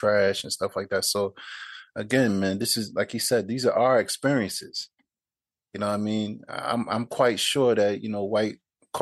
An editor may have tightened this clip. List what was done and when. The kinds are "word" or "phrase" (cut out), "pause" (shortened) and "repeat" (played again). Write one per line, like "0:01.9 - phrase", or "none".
none